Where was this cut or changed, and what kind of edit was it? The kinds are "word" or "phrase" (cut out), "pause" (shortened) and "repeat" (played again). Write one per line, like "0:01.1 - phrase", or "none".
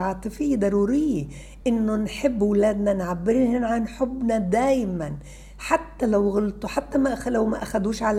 none